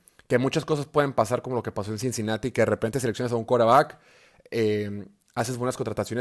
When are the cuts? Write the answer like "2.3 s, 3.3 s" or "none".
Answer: none